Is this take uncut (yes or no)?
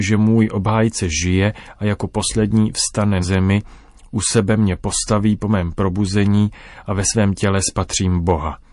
no